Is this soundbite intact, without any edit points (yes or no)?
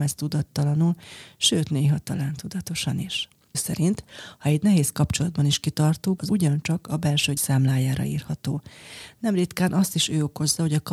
no